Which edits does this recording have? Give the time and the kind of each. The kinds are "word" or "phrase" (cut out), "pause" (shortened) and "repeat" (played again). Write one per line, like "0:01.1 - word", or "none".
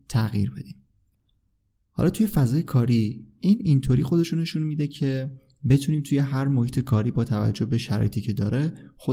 none